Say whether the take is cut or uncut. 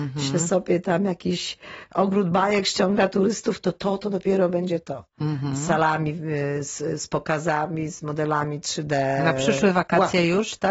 uncut